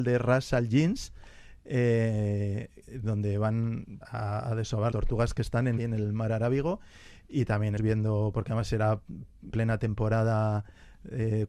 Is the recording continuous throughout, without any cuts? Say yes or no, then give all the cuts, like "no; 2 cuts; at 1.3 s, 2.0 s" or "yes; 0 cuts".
no; 5 cuts; at 4.0 s, 4.9 s, 5.8 s, 7.8 s, 9.5 s